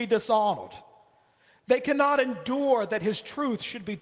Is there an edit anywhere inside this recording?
no; 0 cuts

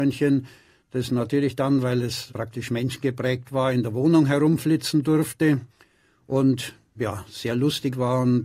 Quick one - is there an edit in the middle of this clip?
no; 0 cuts

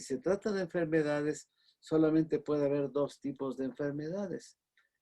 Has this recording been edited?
no; 0 cuts

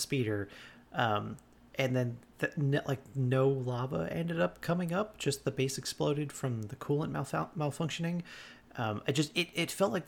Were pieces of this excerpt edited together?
no; 0 cuts

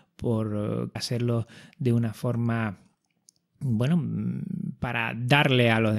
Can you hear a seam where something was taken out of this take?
yes; 1 cut; at 1.0 s

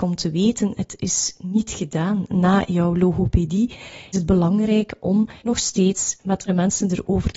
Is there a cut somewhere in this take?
yes; 3 cuts; at 4.1 s, 5.4 s, 6.5 s

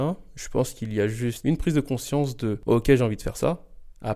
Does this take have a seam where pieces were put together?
no; 0 cuts

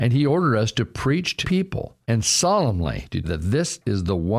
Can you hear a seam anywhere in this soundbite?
yes; 3 cuts; at 1.4 s, 2.0 s, 3.2 s

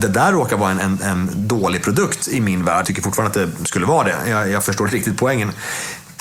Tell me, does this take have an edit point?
yes; 2 cuts; at 2.8 s, 4.9 s

